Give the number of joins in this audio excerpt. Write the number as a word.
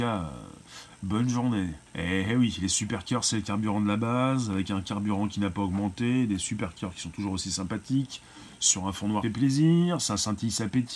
two